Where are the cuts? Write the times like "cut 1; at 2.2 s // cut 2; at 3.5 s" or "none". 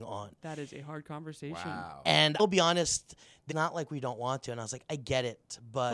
cut 1; at 2.4 s // cut 2; at 3.5 s